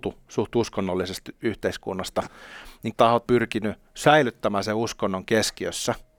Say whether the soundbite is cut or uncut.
cut